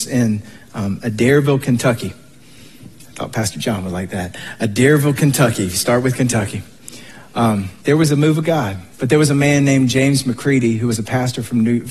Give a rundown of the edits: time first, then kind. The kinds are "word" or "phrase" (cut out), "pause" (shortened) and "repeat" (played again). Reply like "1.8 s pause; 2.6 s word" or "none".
7.8 s pause; 8.9 s pause